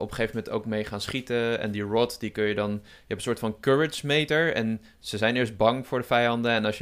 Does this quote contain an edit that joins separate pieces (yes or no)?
no